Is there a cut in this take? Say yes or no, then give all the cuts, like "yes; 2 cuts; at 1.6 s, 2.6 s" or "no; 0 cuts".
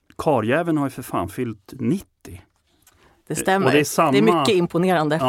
no; 0 cuts